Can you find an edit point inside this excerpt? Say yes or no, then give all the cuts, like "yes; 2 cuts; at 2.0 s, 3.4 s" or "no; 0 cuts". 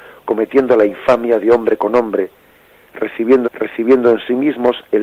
yes; 1 cut; at 3.4 s